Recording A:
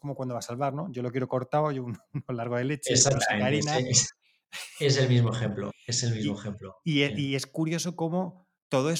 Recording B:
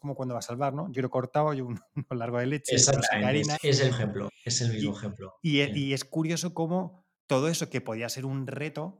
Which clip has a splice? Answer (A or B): B